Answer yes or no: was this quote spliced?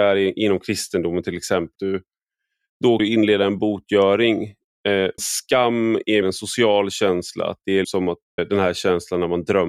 yes